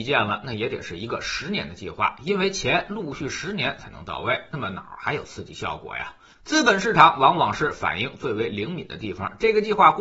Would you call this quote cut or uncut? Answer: uncut